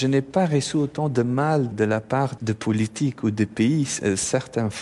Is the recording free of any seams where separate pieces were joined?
no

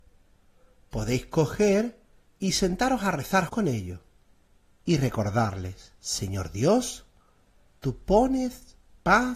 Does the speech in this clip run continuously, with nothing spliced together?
no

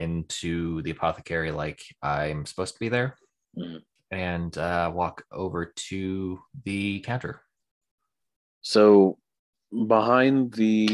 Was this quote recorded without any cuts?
yes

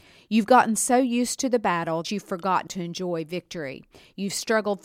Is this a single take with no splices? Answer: no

